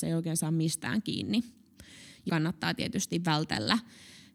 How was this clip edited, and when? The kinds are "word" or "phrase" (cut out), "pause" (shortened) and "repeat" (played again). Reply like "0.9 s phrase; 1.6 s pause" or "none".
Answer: 2.3 s word